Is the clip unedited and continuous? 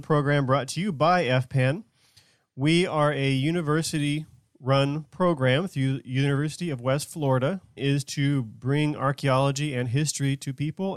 no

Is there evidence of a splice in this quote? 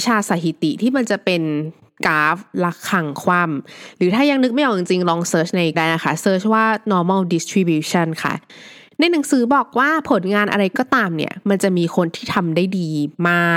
yes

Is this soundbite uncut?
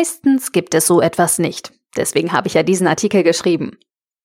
yes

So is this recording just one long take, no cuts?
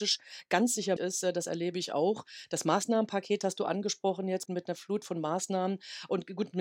no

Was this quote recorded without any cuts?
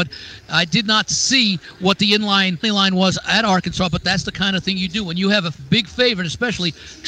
no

